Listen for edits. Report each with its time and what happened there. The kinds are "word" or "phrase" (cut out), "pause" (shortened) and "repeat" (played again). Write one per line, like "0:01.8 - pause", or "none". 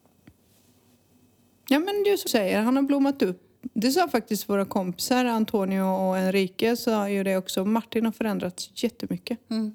0:02.3 - word